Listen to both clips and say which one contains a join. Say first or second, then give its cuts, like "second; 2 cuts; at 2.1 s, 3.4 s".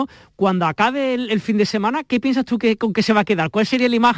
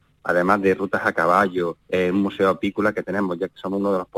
second; 1 cut; at 1.8 s